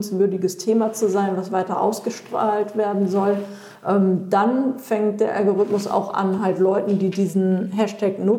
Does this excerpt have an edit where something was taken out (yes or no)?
no